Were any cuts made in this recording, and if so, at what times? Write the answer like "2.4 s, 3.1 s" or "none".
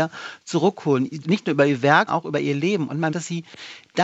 1.2 s, 2.1 s, 3.1 s